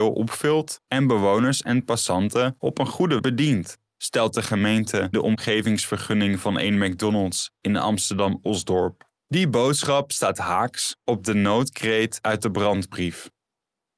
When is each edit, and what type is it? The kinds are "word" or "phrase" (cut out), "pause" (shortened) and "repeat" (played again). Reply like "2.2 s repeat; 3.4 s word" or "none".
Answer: 3.2 s word; 5.1 s word; 9.2 s pause